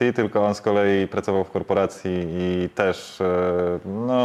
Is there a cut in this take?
no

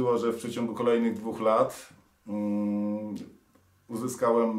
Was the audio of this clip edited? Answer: no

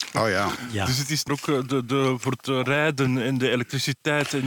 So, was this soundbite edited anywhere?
yes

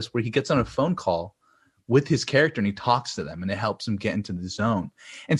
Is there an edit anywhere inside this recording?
no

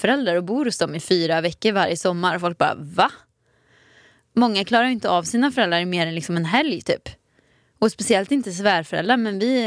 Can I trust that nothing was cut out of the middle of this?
yes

